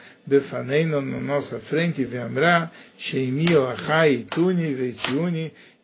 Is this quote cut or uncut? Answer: uncut